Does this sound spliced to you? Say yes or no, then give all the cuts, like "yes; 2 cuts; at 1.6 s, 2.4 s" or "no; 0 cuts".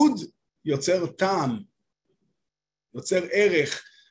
no; 0 cuts